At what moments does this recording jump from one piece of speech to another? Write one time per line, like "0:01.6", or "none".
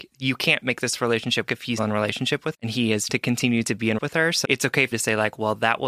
0:01.5
0:01.8
0:02.5
0:03.1
0:04.0
0:04.4
0:04.9